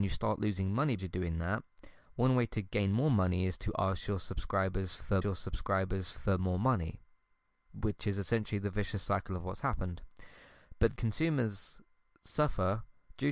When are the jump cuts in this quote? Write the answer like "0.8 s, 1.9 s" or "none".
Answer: 1.0 s, 5.2 s, 11.0 s